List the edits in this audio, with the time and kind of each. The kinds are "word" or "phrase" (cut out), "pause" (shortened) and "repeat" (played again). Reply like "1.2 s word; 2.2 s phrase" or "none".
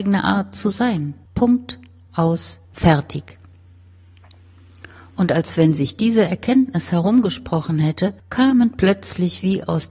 1.3 s pause; 2.6 s pause; 8.2 s pause